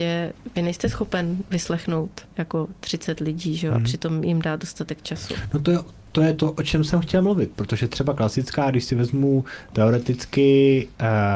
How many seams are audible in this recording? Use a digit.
1